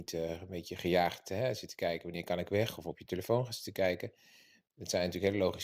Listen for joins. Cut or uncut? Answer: uncut